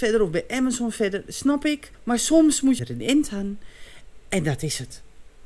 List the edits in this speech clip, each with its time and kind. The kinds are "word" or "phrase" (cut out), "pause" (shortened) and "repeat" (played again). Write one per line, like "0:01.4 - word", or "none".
0:01.9 - pause
0:02.8 - phrase

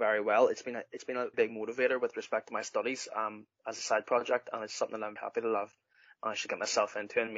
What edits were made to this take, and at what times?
0:01.3 - word
0:05.2 - word

